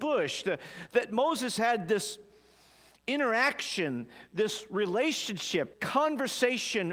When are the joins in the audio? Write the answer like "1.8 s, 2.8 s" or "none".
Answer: 1.6 s, 5.7 s